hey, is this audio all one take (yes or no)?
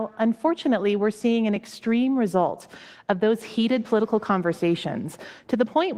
yes